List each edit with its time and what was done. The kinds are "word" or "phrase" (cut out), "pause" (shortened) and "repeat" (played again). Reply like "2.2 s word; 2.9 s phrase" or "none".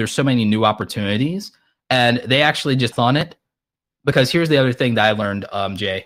2.9 s phrase